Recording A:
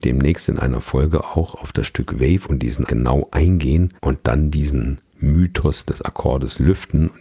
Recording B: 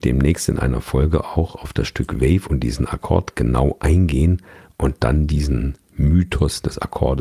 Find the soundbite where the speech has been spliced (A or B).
A